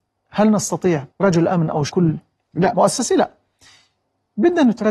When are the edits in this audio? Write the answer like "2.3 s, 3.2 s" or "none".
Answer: 1.1 s, 1.9 s